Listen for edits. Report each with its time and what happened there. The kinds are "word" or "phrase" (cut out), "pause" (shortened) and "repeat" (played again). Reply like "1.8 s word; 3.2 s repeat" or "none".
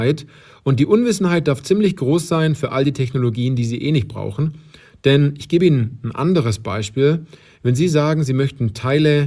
none